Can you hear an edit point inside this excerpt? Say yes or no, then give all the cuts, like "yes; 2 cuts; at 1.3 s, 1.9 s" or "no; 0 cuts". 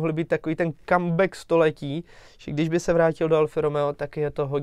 no; 0 cuts